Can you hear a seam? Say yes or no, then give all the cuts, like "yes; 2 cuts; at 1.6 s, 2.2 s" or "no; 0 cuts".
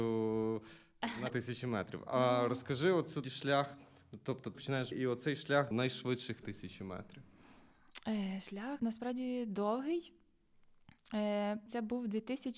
yes; 8 cuts; at 1.3 s, 3.2 s, 4.5 s, 4.9 s, 5.7 s, 6.4 s, 8.8 s, 11.7 s